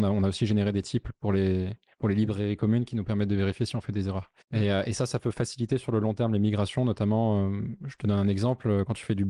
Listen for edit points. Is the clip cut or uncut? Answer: cut